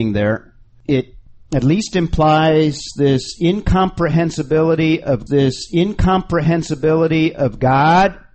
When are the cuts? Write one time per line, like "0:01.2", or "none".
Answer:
0:05.3